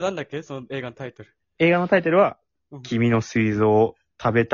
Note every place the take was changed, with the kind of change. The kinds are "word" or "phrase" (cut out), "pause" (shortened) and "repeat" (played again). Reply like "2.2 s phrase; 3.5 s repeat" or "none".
none